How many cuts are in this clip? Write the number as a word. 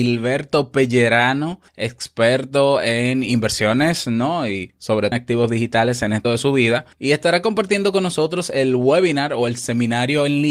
four